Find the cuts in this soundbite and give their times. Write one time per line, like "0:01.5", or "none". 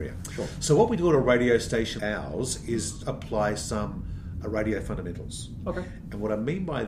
0:02.0
0:03.0